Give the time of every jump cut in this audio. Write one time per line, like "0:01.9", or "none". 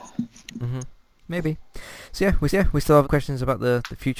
0:02.1
0:02.5
0:03.0